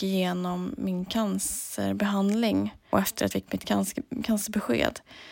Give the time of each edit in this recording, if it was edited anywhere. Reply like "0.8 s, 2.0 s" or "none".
2.9 s, 3.3 s